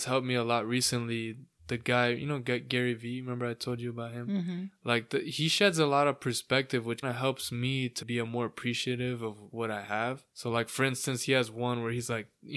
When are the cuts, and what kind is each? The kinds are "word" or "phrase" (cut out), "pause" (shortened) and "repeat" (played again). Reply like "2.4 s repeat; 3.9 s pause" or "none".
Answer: 7.0 s word; 8.0 s word; 9.5 s word; 10.3 s pause